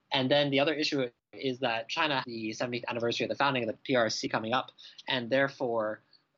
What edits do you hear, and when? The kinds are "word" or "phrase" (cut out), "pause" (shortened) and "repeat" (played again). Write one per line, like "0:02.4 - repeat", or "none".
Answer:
0:02.2 - word